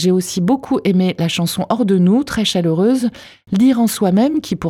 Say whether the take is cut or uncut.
uncut